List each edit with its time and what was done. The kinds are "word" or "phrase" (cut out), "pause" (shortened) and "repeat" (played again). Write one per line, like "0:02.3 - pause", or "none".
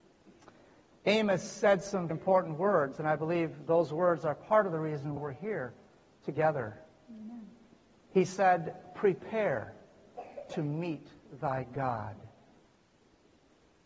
0:02.1 - word
0:05.2 - word